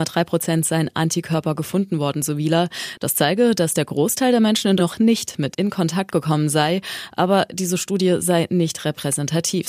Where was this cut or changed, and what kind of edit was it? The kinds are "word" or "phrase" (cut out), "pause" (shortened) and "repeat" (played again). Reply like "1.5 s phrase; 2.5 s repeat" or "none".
4.8 s phrase; 5.5 s phrase